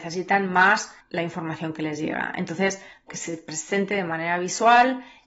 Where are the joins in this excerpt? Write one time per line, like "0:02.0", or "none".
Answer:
0:01.0
0:03.1